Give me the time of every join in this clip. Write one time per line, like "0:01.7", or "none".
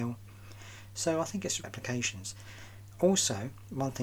0:01.6